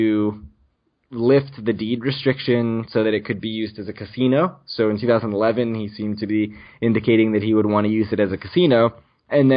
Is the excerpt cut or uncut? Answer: uncut